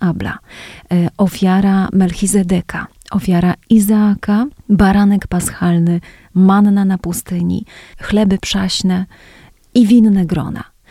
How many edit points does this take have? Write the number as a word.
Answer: zero